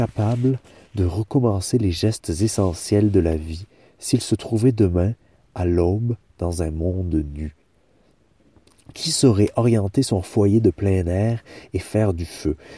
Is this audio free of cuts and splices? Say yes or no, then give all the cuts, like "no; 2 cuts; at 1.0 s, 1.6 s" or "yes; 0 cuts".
yes; 0 cuts